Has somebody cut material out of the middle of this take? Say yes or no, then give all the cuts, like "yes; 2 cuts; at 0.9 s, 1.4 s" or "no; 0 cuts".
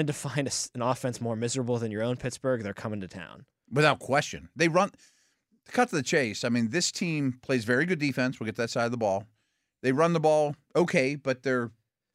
no; 0 cuts